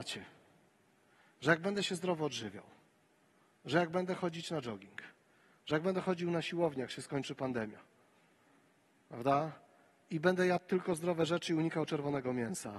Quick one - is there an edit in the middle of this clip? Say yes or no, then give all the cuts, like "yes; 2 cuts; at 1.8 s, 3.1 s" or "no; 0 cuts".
no; 0 cuts